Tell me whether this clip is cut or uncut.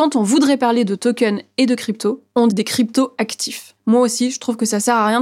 cut